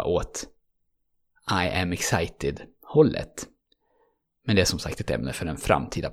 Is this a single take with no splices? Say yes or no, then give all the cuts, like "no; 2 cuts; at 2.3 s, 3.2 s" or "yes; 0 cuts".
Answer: yes; 0 cuts